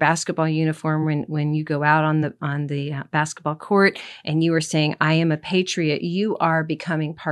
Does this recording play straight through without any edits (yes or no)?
yes